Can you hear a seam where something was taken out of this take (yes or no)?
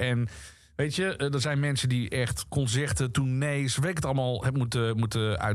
no